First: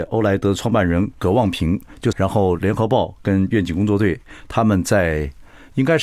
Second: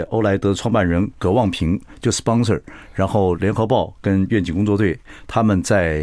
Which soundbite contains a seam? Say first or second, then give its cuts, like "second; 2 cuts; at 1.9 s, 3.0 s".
first; 1 cut; at 2.1 s